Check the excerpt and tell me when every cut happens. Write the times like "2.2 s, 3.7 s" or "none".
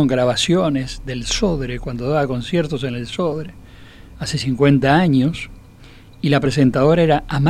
none